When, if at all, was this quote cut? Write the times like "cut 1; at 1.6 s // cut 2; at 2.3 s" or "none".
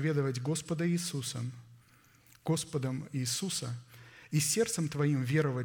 none